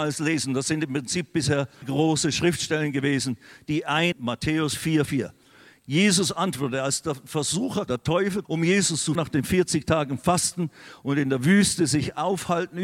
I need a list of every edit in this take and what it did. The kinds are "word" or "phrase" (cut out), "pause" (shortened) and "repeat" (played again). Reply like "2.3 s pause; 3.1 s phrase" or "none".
1.8 s word; 4.1 s word; 5.1 s word; 7.9 s word; 8.4 s word; 9.1 s word